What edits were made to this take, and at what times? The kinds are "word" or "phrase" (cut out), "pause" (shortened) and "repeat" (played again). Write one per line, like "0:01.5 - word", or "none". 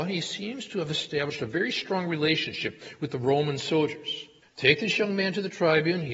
0:04.4 - pause